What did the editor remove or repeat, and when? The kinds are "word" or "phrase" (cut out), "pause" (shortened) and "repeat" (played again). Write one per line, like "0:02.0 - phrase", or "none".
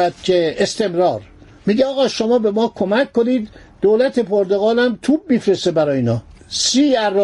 none